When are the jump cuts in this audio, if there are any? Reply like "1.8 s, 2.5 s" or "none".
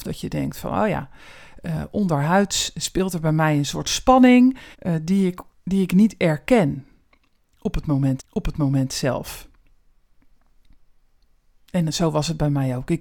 4.7 s, 5.5 s, 8.2 s